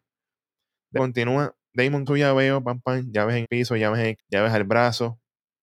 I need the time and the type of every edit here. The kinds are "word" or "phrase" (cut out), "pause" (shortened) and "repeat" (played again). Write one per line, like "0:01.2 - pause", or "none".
0:01.0 - word
0:02.1 - word
0:02.8 - word
0:03.4 - word
0:04.2 - word